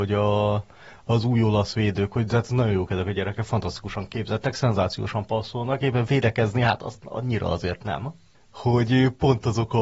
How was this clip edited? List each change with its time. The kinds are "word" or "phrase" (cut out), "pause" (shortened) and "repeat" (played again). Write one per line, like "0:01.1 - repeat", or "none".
none